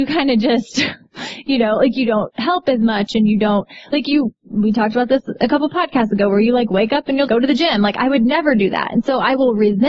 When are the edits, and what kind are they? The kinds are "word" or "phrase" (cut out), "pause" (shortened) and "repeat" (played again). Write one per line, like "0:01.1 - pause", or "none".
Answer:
0:07.3 - word